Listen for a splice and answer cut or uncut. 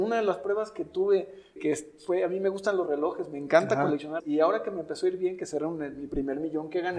cut